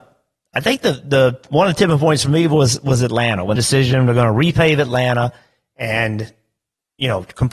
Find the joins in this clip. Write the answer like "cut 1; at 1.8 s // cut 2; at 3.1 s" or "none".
cut 1; at 3.6 s